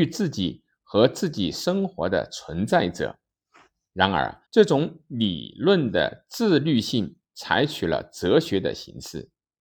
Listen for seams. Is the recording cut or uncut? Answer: cut